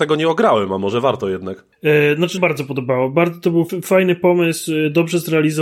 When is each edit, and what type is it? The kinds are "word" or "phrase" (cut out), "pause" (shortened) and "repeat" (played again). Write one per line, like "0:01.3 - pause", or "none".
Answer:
0:01.7 - pause
0:02.4 - phrase
0:03.7 - word